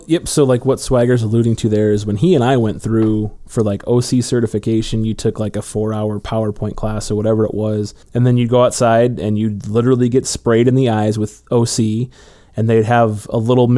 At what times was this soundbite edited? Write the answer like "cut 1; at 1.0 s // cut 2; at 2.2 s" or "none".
cut 1; at 8.0 s